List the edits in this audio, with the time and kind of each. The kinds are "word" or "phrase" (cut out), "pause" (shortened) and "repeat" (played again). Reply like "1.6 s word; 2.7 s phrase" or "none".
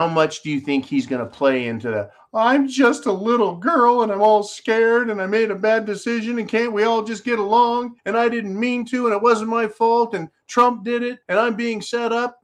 8.0 s pause; 11.2 s pause